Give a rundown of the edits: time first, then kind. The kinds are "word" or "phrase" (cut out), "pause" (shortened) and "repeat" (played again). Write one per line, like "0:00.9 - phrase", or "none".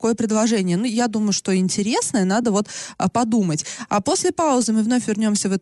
none